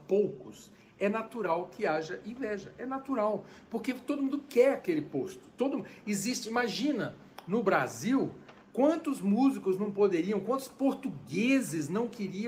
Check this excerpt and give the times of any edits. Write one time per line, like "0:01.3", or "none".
none